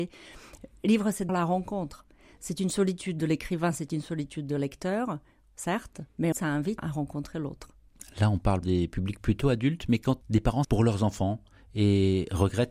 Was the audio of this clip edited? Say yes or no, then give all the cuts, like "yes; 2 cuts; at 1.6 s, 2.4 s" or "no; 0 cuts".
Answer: yes; 6 cuts; at 1.3 s, 6.3 s, 6.8 s, 8.6 s, 10.2 s, 10.6 s